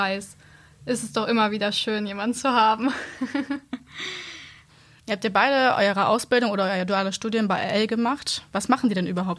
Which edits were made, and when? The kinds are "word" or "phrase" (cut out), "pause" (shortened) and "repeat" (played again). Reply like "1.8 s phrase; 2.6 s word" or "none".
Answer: none

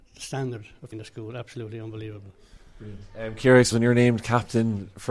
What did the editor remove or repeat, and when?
0.9 s word; 3.7 s word

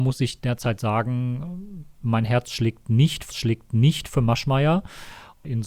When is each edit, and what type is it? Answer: 1.9 s pause; 3.3 s repeat

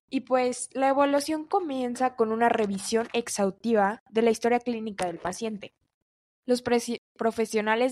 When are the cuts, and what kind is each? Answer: 6.1 s pause

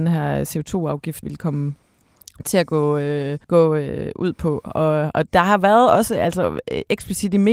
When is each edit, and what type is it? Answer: 1.2 s word; 3.4 s pause

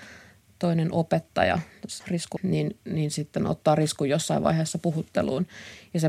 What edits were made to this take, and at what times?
2.0 s word; 2.4 s word

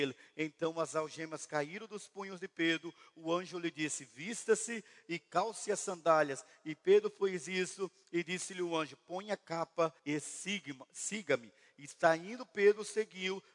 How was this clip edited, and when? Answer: 10.0 s pause

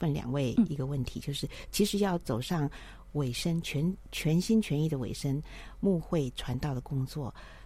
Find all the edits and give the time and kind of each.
none

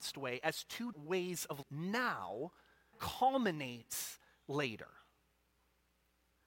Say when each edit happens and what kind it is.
0.9 s word; 1.6 s word; 2.9 s word

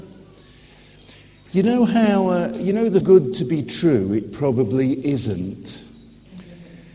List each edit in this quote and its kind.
3.0 s phrase

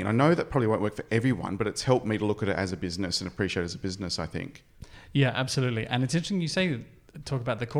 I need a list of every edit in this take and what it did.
none

